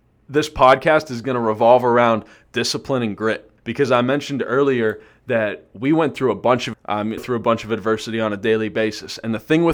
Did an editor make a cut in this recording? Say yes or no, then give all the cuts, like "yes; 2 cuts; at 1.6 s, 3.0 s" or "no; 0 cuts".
yes; 3 cuts; at 3.6 s, 6.7 s, 7.2 s